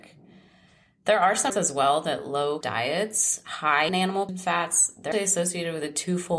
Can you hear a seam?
yes; 5 cuts; at 1.5 s, 2.6 s, 3.9 s, 4.3 s, 5.1 s

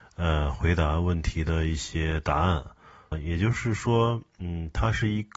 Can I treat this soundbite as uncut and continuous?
no; 1 cut; at 3.1 s

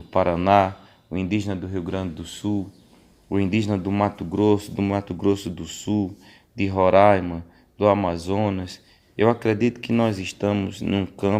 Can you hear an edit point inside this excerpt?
no; 0 cuts

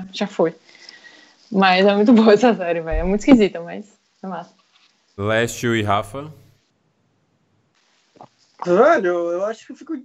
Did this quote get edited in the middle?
no; 0 cuts

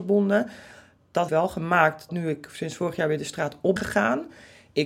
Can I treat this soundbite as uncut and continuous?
no; 3 cuts; at 1.3 s, 2.1 s, 3.8 s

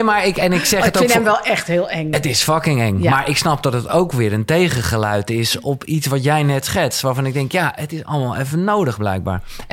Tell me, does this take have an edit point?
yes; 1 cut; at 5.6 s

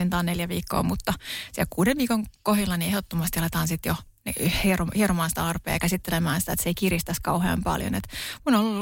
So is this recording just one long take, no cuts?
yes; 0 cuts

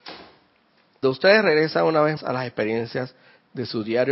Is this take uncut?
no; 2 cuts; at 1.0 s, 2.2 s

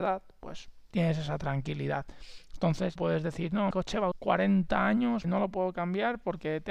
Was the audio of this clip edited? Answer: yes; 4 cuts; at 3.0 s, 3.7 s, 4.1 s, 5.2 s

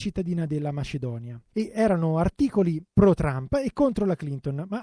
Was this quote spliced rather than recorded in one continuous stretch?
yes; 1 cut; at 2.9 s

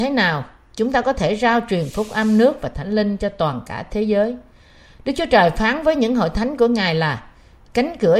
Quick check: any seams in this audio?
no; 0 cuts

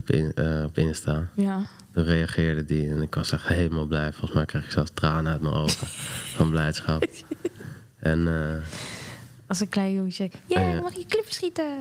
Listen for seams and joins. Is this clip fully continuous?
yes; 0 cuts

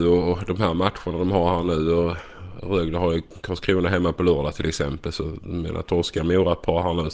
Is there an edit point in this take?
no; 0 cuts

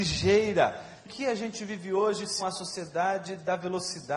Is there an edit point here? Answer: yes; 2 cuts; at 1.0 s, 2.4 s

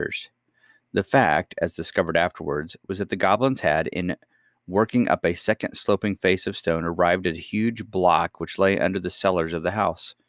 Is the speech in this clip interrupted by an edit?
no; 0 cuts

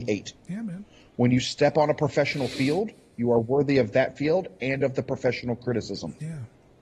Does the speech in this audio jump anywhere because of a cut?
no; 0 cuts

